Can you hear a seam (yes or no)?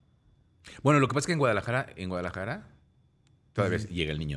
no